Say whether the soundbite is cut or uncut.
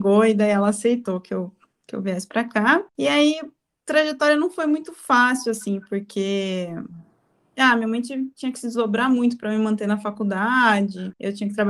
uncut